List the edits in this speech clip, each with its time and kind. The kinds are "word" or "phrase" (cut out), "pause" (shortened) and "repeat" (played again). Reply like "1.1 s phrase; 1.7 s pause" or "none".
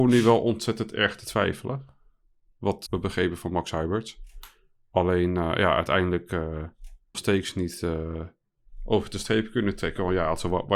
2.9 s word; 7.1 s word